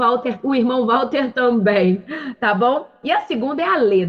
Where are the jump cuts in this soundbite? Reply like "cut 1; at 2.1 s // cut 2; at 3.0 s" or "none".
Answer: none